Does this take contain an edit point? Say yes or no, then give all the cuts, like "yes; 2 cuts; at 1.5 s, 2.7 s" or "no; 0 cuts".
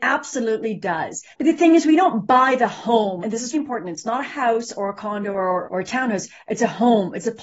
yes; 4 cuts; at 1.3 s, 3.2 s, 3.5 s, 5.6 s